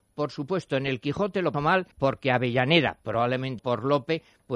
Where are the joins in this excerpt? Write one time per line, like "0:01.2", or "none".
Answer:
0:01.5
0:01.9
0:03.6

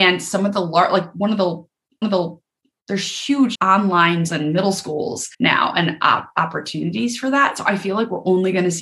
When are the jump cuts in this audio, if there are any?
0:02.0
0:03.5
0:04.3
0:05.3

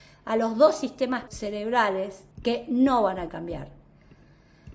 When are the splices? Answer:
0:01.3
0:02.3
0:03.3

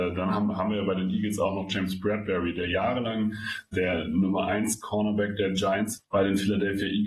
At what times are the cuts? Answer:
0:03.7
0:06.0

